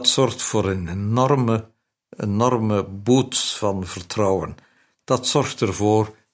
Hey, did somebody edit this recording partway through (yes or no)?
no